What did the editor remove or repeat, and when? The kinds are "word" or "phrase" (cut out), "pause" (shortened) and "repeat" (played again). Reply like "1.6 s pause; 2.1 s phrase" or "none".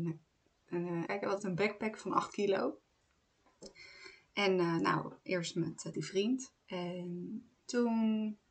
1.1 s word; 1.4 s word; 5.2 s pause; 5.9 s phrase; 6.6 s pause